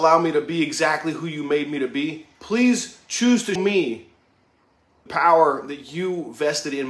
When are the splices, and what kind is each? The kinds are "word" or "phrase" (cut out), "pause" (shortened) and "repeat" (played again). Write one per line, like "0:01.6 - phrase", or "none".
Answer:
0:02.3 - pause
0:03.6 - word
0:05.1 - word